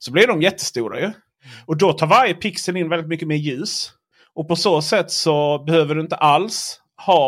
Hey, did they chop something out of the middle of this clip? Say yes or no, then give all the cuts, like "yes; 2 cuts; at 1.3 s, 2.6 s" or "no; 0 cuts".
no; 0 cuts